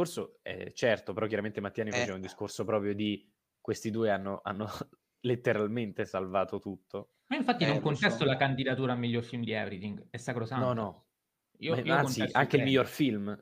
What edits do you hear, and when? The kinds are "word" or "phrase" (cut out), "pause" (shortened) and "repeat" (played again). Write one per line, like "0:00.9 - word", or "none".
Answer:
none